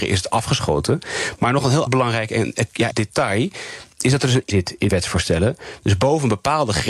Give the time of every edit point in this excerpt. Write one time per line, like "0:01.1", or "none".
0:01.9
0:02.9
0:04.5
0:04.9